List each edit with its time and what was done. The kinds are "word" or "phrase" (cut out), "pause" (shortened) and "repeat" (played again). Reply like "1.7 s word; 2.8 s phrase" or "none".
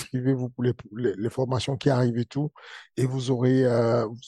none